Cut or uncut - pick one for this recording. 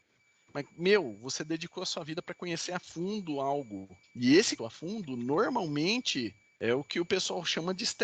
cut